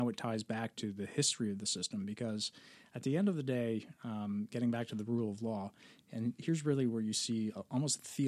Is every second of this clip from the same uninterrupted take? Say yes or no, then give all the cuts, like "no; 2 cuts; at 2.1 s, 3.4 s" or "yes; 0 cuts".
yes; 0 cuts